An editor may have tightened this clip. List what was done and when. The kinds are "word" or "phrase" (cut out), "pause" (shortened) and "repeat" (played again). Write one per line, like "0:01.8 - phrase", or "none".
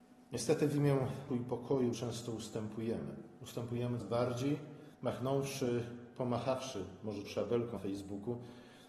0:01.3 - word
0:01.9 - word
0:04.0 - word
0:04.9 - pause
0:07.2 - phrase
0:07.8 - word